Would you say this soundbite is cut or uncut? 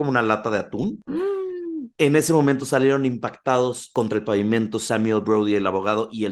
uncut